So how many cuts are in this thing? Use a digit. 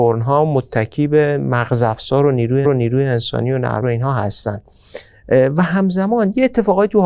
2